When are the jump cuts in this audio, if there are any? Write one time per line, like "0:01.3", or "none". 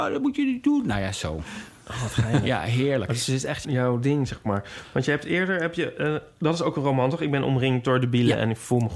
0:03.6